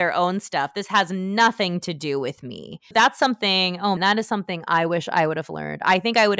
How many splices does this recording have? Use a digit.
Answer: 2